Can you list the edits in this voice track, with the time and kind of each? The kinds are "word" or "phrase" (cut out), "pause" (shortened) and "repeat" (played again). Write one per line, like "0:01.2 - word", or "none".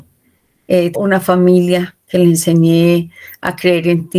0:00.9 - word